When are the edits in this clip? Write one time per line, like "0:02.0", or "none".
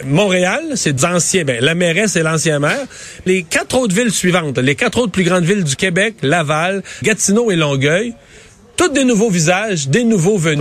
0:01.0
0:03.3
0:05.8
0:07.0

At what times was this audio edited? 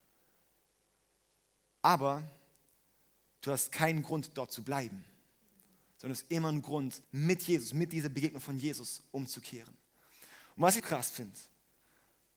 0:07.0
0:10.8

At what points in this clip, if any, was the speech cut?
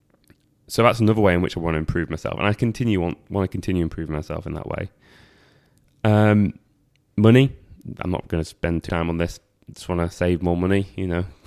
0:08.9

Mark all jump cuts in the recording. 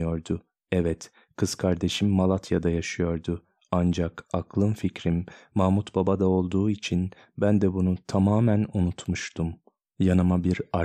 none

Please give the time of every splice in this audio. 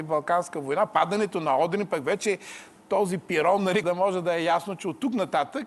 0:03.8

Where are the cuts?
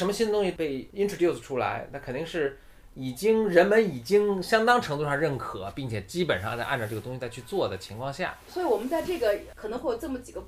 none

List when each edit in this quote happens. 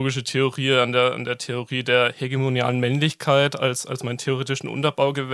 none

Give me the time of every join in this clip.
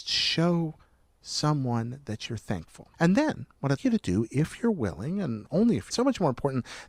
0:02.9
0:03.8
0:05.9

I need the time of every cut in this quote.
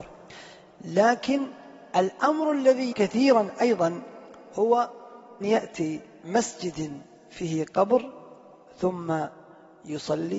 0:02.9
0:05.4
0:06.2

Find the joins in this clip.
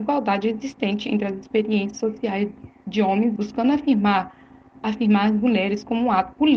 0:03.4

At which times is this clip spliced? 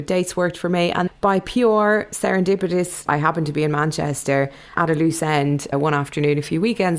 0:01.1
0:03.1
0:04.8
0:05.7

